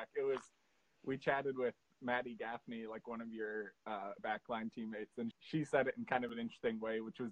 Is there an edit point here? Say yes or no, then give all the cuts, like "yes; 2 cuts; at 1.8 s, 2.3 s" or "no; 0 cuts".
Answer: yes; 2 cuts; at 4.2 s, 5.3 s